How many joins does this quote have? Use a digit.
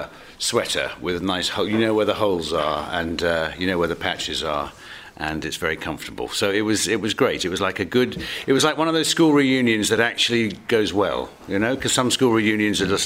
0